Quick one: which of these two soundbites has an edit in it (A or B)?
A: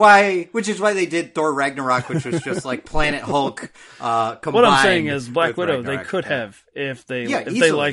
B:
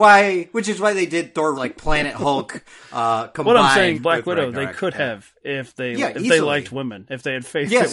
B